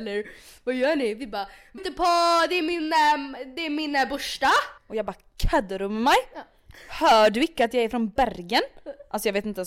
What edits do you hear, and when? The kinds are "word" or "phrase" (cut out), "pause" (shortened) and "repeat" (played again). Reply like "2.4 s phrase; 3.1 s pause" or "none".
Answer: 1.8 s word; 4.8 s pause